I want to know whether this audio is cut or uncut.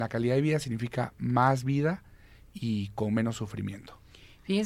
uncut